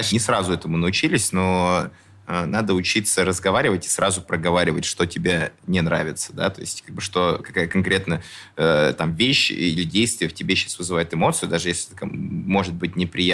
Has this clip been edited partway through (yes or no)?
no